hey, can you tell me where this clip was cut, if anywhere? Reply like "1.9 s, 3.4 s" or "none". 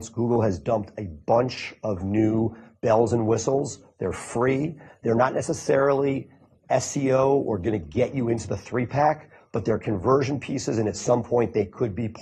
none